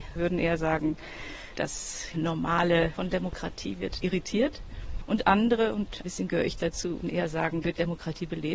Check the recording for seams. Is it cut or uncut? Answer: cut